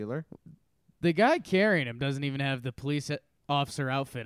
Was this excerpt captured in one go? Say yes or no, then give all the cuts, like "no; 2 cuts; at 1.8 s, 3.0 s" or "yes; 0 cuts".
yes; 0 cuts